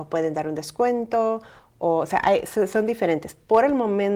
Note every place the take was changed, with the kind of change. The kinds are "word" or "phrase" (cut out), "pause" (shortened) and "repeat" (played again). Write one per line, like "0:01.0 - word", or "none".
none